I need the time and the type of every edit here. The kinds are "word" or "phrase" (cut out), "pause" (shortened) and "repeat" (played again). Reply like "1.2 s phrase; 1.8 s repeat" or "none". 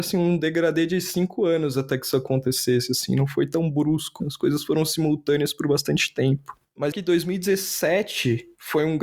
4.2 s word; 6.9 s phrase